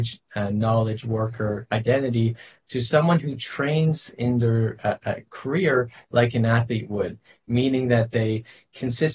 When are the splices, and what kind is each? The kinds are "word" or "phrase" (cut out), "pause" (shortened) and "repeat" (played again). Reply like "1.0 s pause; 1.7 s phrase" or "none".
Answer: none

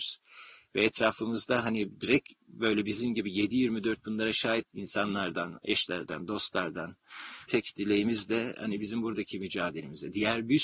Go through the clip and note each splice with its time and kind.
4.6 s word; 7.5 s word

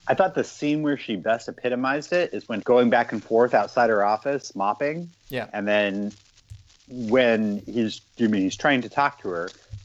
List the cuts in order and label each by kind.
2.6 s word

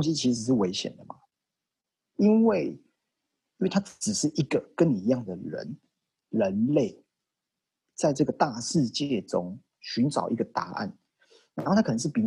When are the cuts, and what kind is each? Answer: none

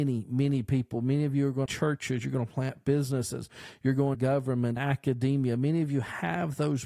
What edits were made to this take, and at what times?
1.7 s phrase; 4.1 s word; 4.8 s word

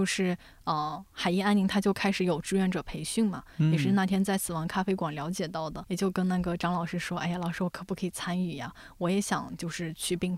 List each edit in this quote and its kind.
5.8 s word

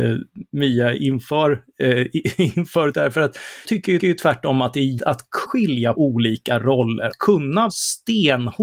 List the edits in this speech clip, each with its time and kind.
2.9 s word; 3.6 s word; 4.0 s repeat; 5.0 s word; 5.4 s word; 5.9 s word; 7.1 s word; 7.7 s word

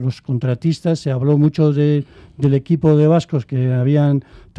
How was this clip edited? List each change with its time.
none

